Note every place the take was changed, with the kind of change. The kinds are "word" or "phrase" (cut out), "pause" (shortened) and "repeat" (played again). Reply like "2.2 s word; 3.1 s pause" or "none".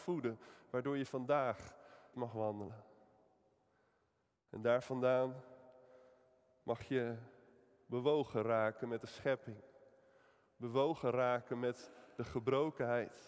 2.1 s word